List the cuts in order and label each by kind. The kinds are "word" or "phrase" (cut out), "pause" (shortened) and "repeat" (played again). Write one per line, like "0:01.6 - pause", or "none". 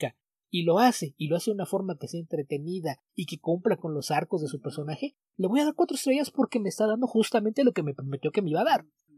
0:03.1 - pause

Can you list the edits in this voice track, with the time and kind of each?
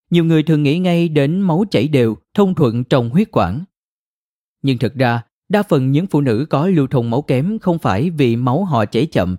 none

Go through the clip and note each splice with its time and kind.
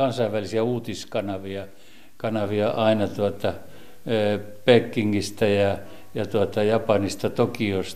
none

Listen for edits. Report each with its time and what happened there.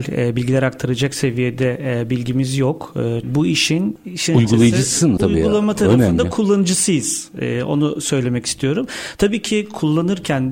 0:03.2 - phrase
0:05.2 - word

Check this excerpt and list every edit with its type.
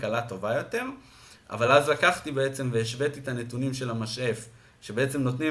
none

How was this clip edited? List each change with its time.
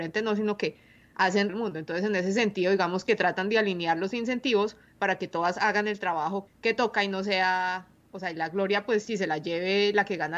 0:01.5 - phrase
0:06.5 - word

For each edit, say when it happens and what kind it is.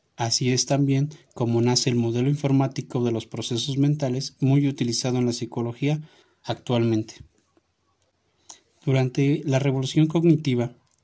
0:06.2 - pause

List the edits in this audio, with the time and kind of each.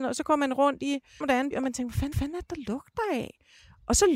0:01.2 - phrase
0:01.5 - word
0:02.1 - repeat

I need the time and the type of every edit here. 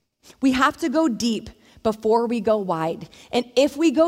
none

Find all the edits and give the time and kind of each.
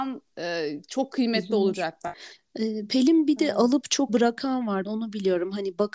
0:04.1 - word
0:04.8 - word

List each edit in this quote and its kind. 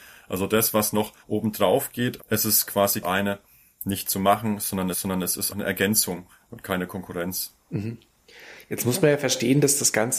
0:01.2 - pause
0:02.2 - word
0:03.0 - phrase
0:04.9 - repeat
0:05.5 - word
0:07.6 - pause

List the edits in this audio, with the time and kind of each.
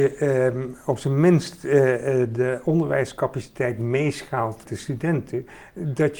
0:04.7 - word

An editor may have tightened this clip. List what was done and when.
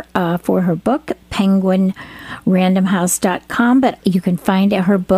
0:04.0 - word

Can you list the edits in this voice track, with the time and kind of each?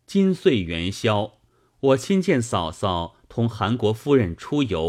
none

